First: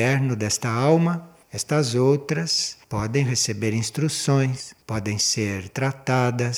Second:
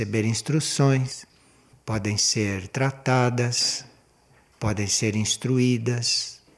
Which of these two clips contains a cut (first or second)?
first